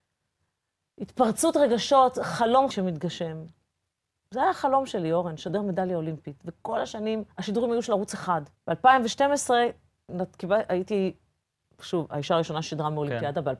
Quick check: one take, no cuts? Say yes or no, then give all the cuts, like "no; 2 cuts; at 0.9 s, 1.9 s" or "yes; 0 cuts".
no; 3 cuts; at 2.7 s, 7.3 s, 8.6 s